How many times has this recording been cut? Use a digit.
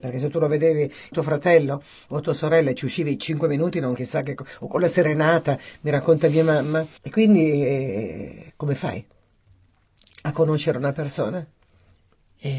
4